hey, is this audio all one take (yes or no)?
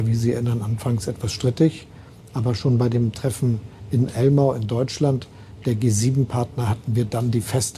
yes